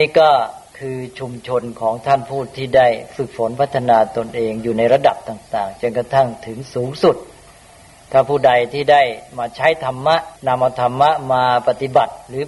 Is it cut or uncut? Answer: cut